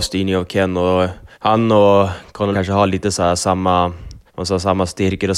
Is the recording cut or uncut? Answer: cut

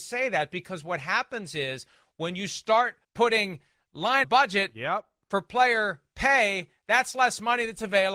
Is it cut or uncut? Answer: cut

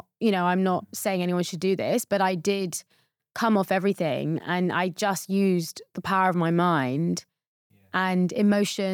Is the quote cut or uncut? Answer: uncut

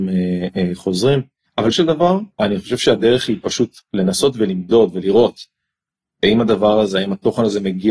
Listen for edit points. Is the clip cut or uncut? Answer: cut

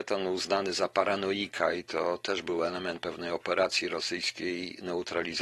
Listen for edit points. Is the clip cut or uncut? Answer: uncut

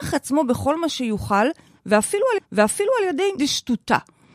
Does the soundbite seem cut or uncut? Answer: cut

